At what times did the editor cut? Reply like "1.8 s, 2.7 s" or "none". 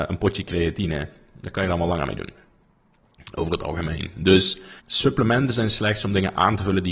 4.8 s